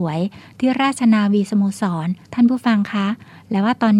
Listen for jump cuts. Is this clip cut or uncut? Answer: cut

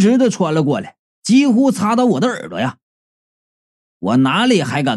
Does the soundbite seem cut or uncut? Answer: uncut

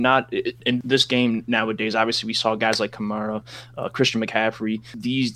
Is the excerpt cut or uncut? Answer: uncut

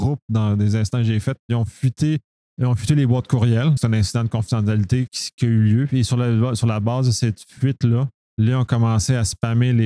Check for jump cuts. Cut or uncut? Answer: cut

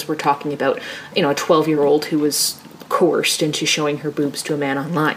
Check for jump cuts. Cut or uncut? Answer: uncut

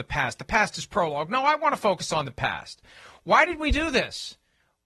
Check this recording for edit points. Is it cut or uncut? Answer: uncut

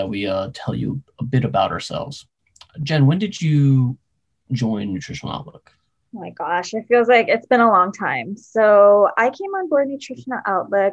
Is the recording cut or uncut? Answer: uncut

